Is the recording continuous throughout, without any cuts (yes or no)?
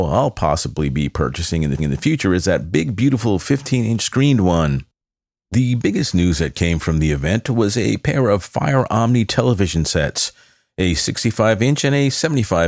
no